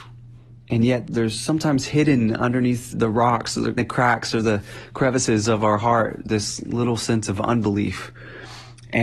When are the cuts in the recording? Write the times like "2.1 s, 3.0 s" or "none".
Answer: 1.1 s, 2.9 s, 3.8 s, 6.3 s